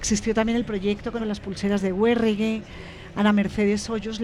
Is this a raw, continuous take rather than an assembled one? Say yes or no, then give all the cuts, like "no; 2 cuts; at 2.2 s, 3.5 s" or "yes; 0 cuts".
no; 1 cut; at 1.2 s